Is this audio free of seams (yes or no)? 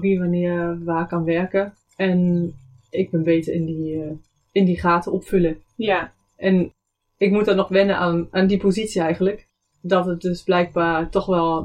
yes